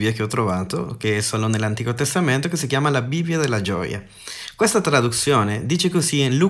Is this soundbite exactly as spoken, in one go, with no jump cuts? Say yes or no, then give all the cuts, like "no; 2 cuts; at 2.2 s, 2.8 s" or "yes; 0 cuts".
yes; 0 cuts